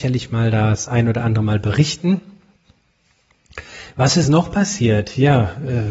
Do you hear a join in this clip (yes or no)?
no